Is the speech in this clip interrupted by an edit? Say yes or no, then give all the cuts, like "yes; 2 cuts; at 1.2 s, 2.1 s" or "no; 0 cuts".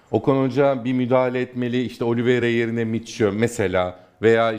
no; 0 cuts